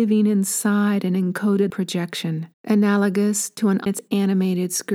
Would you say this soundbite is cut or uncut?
cut